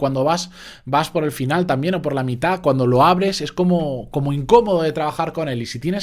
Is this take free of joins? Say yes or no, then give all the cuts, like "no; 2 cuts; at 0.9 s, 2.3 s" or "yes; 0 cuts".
yes; 0 cuts